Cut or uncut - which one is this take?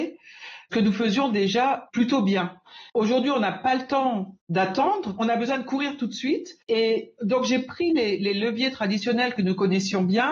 cut